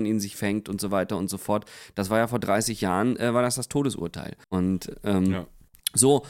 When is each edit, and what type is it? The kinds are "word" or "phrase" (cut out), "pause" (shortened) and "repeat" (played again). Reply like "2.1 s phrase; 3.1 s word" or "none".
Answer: 4.4 s pause